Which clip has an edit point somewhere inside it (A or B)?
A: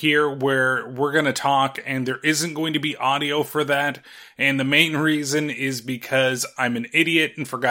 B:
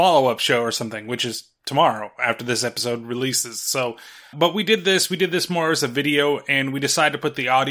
B